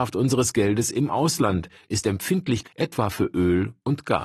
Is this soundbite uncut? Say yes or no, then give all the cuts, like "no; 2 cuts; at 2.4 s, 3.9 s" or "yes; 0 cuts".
no; 1 cut; at 2.6 s